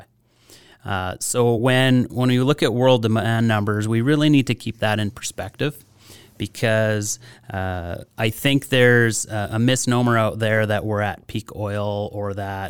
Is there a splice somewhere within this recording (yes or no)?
no